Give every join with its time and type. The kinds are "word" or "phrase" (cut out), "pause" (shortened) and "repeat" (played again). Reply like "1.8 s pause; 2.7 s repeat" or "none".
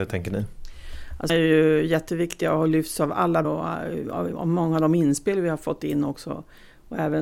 1.3 s word; 3.4 s word